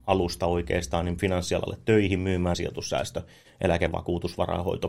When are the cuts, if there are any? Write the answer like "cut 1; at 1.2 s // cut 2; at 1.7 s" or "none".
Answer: cut 1; at 1.2 s // cut 2; at 2.5 s